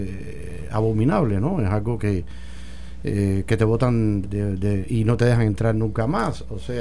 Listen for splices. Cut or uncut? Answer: cut